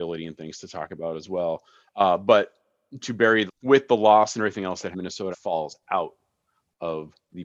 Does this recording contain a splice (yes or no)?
yes